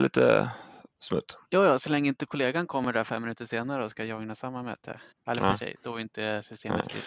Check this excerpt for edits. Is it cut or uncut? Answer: cut